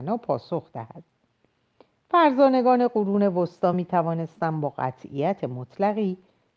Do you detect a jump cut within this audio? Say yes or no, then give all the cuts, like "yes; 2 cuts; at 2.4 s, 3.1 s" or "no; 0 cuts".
no; 0 cuts